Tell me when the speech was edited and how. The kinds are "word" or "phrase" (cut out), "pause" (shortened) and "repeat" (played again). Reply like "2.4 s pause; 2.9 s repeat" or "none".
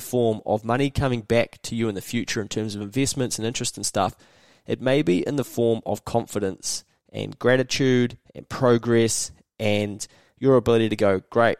none